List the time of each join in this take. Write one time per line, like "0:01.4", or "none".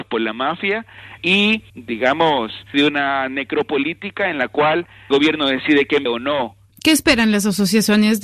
0:02.7
0:05.1
0:06.1